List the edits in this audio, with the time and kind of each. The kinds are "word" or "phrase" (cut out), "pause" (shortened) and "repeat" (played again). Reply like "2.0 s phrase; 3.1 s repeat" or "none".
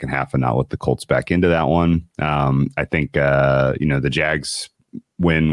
none